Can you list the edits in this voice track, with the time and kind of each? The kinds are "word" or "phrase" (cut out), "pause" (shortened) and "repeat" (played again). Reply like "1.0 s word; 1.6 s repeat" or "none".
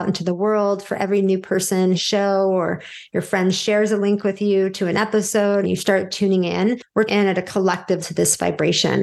2.0 s phrase; 5.6 s word; 7.1 s word; 8.0 s word